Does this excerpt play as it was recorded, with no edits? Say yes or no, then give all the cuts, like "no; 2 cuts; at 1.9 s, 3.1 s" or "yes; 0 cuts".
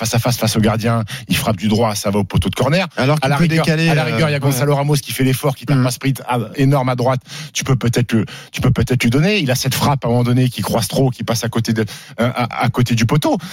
no; 1 cut; at 6.5 s